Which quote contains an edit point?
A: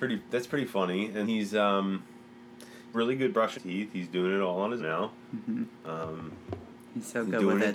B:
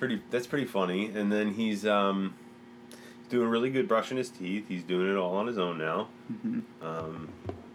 A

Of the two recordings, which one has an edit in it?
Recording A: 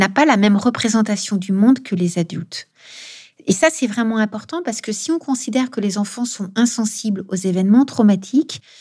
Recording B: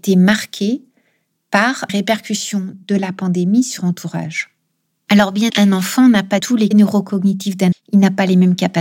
B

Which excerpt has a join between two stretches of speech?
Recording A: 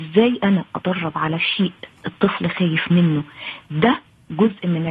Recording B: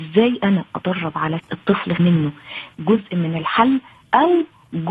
B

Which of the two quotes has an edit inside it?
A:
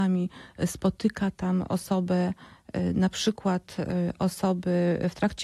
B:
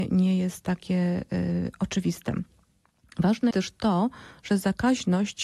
B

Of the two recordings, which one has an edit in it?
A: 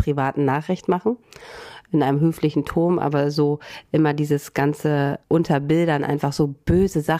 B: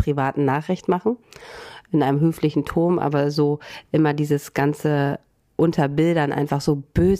A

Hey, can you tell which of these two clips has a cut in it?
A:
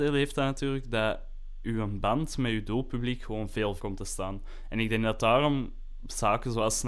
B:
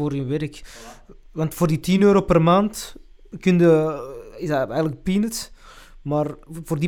A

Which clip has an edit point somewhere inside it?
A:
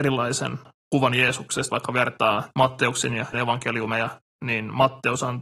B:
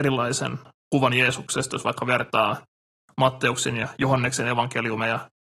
A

